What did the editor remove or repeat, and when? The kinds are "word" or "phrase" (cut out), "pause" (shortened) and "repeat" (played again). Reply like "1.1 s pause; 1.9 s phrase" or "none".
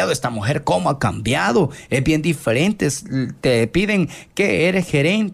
none